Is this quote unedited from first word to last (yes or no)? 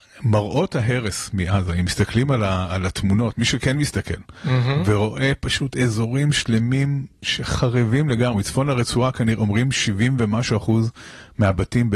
yes